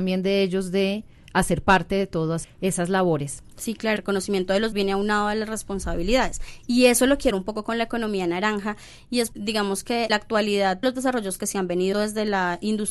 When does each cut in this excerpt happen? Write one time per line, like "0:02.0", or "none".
0:02.4
0:04.0
0:04.7
0:07.3
0:09.3
0:10.1
0:10.8
0:11.4
0:11.9